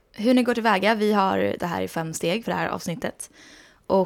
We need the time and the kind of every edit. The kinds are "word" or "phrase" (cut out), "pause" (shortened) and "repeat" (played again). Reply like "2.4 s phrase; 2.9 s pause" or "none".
1.6 s phrase; 2.4 s word